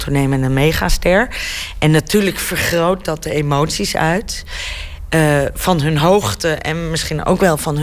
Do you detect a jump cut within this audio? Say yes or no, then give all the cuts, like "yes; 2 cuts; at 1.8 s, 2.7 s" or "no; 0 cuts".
no; 0 cuts